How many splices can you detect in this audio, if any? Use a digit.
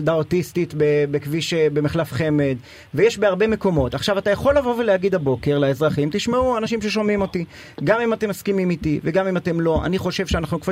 0